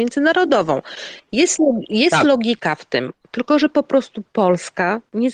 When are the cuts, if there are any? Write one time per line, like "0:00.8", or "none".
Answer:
none